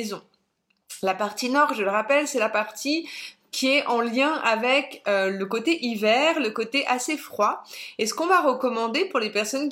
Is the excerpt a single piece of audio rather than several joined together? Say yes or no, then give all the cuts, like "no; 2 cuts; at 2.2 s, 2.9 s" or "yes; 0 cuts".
yes; 0 cuts